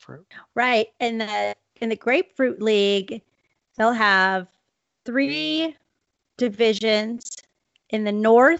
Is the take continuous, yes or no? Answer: yes